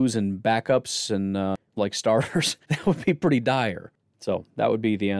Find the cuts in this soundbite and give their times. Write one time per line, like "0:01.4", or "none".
0:01.8
0:02.6